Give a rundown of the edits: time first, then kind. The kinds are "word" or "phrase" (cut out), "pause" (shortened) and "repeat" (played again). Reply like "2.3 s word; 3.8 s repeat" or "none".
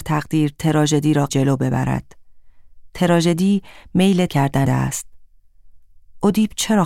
1.3 s word; 4.3 s word; 4.6 s word